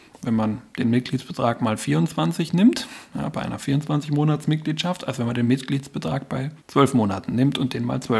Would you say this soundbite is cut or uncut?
cut